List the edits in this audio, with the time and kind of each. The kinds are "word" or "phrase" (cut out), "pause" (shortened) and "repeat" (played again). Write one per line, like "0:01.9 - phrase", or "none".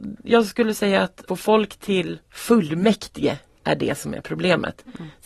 0:01.3 - phrase
0:02.2 - pause